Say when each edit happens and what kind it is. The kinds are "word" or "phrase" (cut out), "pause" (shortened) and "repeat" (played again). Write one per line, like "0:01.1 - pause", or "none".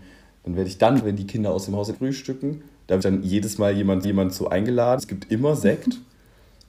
0:01.0 - word
0:01.9 - phrase
0:03.0 - phrase
0:04.0 - repeat
0:05.0 - word
0:05.3 - word

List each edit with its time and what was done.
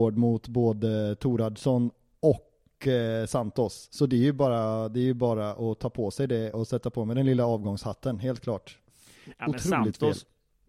0:06.5 - word

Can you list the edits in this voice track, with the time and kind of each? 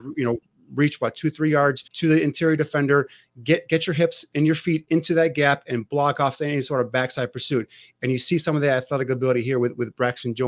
0:01.9 - pause

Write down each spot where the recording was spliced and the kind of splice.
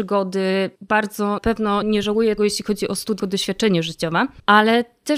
0:01.4 - word
0:01.8 - word
0:02.4 - word
0:03.2 - word

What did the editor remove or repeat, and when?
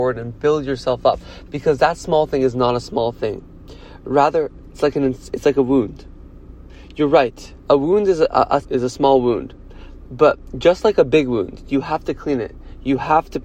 0:07.6 - pause
0:08.6 - phrase

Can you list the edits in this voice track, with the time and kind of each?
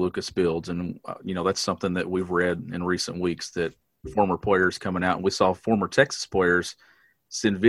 none

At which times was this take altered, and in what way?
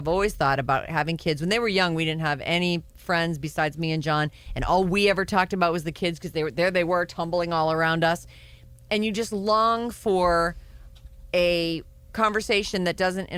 none

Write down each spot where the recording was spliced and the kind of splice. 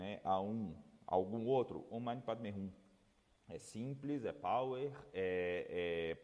none

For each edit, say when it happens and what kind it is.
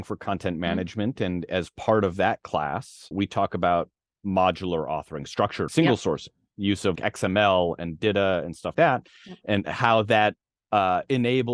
0:03.1 - word
0:05.7 - word
0:06.9 - word
0:08.7 - word

